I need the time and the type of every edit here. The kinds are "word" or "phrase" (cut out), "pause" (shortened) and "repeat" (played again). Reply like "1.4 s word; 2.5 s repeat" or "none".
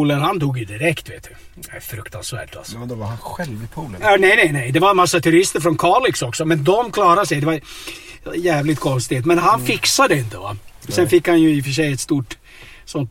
none